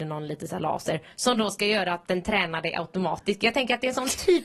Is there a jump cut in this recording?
no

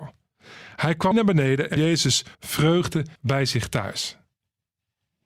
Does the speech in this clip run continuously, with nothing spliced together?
no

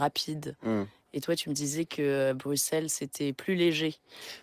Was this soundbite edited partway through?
no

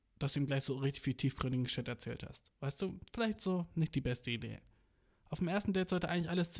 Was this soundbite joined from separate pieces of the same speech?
no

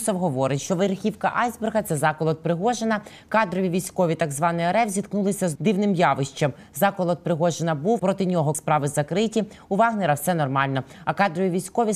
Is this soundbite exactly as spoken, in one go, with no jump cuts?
no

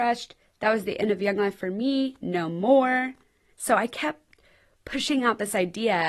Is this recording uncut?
yes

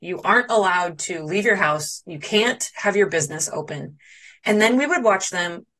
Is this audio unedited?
yes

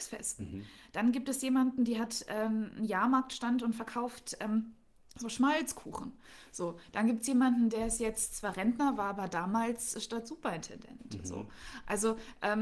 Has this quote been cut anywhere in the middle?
no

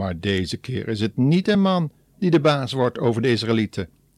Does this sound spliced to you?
no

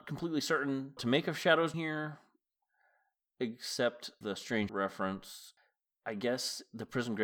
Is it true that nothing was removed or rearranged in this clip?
no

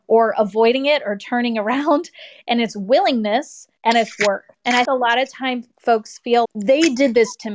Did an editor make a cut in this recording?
yes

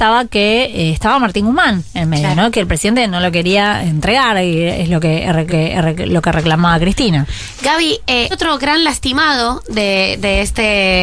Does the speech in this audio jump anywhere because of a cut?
yes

